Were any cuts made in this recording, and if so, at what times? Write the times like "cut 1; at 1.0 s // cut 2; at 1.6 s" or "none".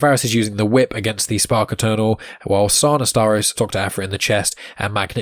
cut 1; at 3.6 s